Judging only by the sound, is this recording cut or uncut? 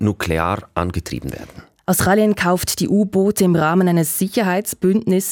uncut